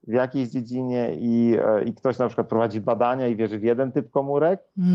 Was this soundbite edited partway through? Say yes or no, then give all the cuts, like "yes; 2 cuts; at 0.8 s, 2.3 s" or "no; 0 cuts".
no; 0 cuts